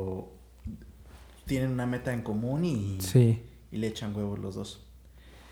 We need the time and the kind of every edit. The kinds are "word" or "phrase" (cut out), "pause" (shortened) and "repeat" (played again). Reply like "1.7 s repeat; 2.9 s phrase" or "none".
none